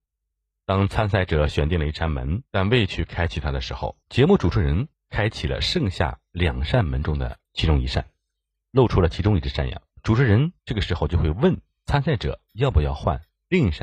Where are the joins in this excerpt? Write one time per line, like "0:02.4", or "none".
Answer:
0:02.5
0:04.0
0:04.9
0:07.4
0:09.9
0:10.6

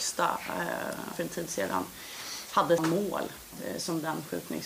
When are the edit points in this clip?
0:01.1
0:02.8

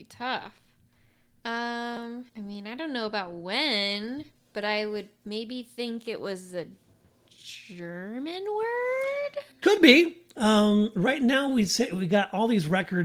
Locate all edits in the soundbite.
0:02.3
0:04.3
0:09.5

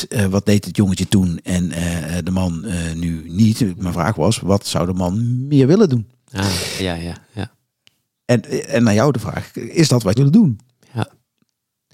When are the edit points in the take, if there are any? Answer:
0:06.8
0:10.2

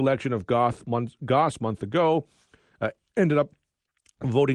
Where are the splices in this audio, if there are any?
none

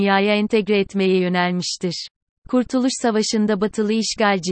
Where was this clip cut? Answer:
0:02.3

